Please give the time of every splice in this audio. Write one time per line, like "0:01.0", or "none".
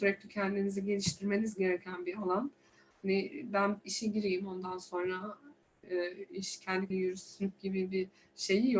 0:06.9